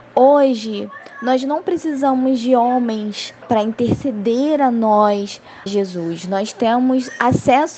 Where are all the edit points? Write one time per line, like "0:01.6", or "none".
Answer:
0:03.4
0:05.7